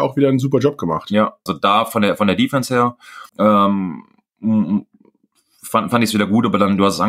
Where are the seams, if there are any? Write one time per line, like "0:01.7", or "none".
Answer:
0:01.5
0:03.3